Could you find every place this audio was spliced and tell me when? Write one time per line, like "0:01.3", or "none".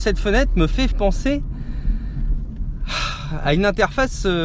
0:00.9